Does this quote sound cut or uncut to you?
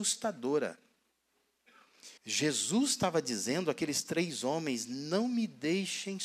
cut